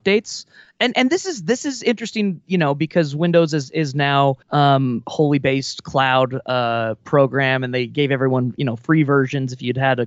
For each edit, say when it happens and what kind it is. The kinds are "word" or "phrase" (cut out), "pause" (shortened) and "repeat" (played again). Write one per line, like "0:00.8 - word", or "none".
0:04.4 - pause